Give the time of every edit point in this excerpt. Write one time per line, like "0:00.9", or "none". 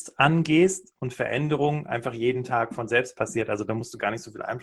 none